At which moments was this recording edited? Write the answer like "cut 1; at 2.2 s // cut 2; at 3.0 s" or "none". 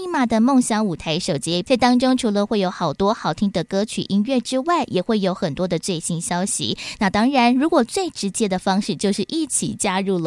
cut 1; at 1.6 s